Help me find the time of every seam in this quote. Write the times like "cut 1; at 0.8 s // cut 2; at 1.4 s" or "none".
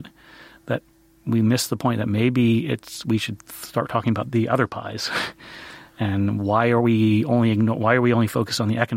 none